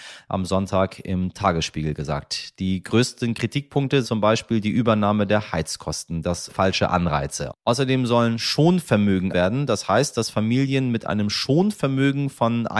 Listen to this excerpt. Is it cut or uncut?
cut